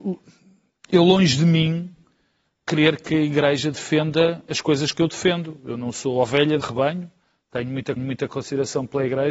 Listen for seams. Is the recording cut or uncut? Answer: cut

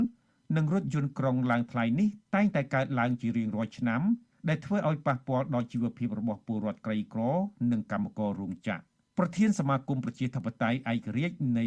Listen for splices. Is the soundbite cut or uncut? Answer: uncut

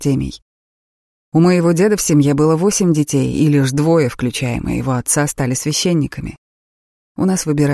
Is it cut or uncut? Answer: uncut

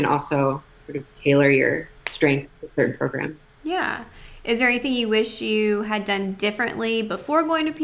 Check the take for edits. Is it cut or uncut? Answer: cut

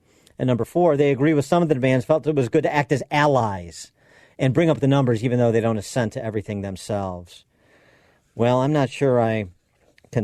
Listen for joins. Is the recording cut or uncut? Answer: uncut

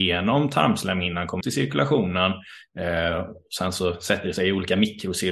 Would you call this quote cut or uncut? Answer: cut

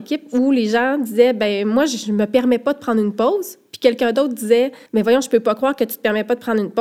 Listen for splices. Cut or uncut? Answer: cut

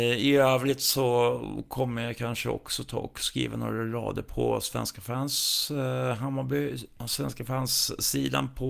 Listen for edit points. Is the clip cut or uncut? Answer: uncut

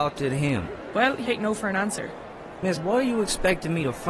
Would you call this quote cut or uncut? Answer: cut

